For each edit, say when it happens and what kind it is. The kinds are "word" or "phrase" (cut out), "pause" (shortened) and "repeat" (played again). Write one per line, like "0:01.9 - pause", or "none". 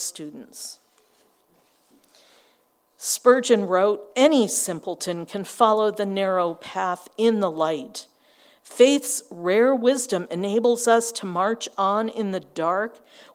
none